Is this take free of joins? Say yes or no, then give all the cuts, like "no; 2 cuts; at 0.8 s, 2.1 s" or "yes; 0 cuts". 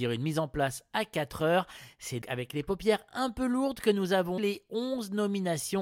no; 2 cuts; at 2.2 s, 4.4 s